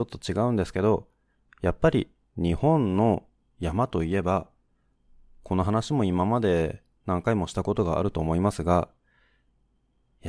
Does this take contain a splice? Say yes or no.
no